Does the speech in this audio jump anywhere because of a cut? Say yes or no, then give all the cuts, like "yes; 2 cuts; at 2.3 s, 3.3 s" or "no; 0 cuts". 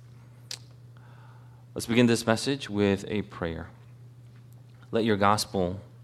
no; 0 cuts